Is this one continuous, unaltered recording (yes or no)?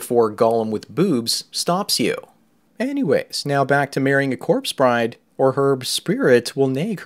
yes